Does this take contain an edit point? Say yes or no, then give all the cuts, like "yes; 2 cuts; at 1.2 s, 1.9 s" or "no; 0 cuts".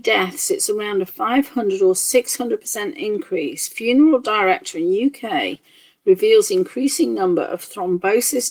no; 0 cuts